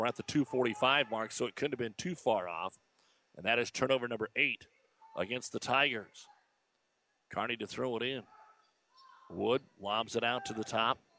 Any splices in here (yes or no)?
no